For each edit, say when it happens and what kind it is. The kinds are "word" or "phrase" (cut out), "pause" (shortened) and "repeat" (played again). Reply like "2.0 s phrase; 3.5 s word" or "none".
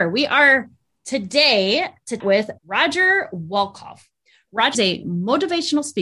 2.2 s word; 2.6 s pause; 4.7 s word